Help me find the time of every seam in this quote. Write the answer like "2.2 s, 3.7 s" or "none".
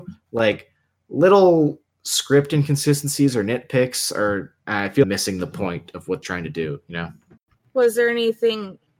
4.6 s, 5.0 s, 6.2 s, 7.4 s